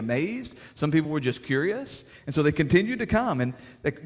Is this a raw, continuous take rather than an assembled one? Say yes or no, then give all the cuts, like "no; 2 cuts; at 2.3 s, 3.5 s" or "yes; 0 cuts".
yes; 0 cuts